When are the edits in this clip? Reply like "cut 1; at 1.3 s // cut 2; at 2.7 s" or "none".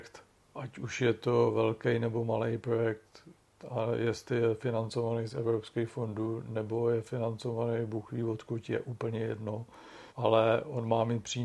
cut 1; at 10.1 s